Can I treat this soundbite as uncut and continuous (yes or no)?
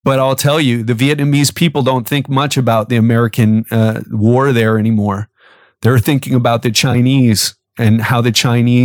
yes